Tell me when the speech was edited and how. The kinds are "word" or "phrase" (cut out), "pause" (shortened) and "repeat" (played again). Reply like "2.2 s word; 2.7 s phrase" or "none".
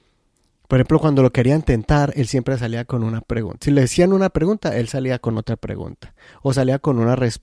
none